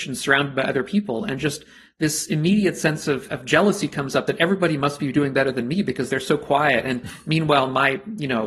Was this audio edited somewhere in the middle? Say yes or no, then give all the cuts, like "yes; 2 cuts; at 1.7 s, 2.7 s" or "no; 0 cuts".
no; 0 cuts